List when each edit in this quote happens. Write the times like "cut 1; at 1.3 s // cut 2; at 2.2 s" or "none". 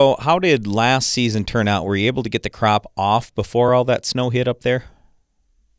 none